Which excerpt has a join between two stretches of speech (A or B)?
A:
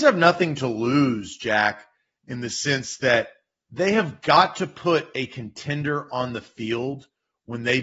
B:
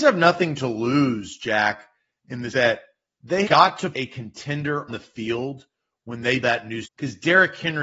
B